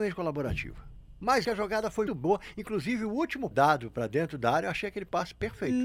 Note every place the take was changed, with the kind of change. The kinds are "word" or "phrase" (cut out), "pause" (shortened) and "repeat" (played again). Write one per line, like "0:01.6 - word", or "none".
0:01.4 - word
0:02.1 - word
0:03.5 - phrase